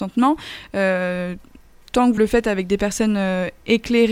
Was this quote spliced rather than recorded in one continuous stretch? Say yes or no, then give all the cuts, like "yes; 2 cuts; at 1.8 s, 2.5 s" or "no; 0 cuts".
yes; 1 cut; at 2.2 s